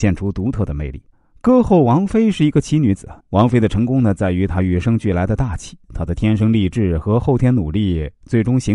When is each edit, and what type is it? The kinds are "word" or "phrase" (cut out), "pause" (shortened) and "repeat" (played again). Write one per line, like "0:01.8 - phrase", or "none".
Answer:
0:01.1 - pause
0:03.2 - pause
0:05.8 - pause